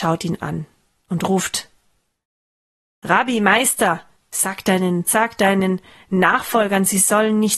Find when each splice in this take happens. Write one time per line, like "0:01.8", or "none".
0:05.1